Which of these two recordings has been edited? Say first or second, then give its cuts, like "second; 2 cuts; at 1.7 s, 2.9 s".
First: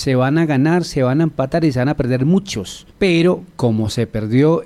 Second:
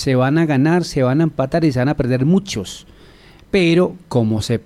first; 1 cut; at 2.9 s